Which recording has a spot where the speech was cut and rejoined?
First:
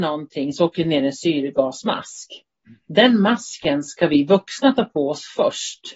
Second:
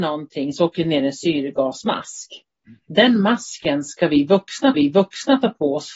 second; 1 cut; at 4.7 s

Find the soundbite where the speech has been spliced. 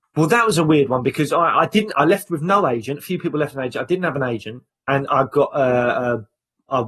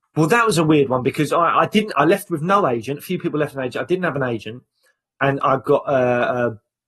first; 1 cut; at 4.7 s

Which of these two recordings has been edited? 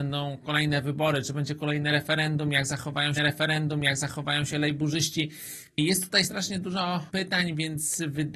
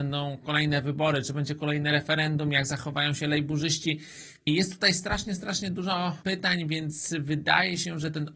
first; 2 cuts; at 3.2 s, 6.2 s

